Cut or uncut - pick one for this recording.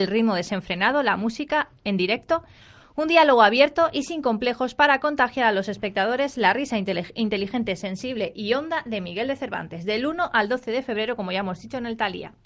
uncut